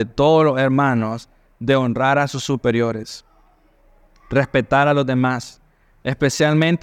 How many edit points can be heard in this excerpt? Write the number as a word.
zero